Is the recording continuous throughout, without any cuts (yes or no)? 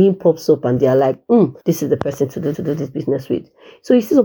no